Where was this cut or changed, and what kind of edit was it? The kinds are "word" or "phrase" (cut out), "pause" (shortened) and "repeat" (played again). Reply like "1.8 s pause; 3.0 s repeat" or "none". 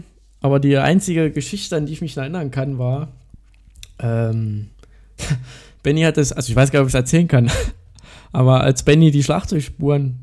4.7 s pause